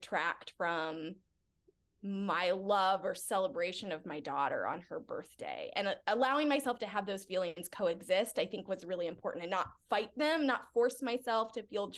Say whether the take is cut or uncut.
uncut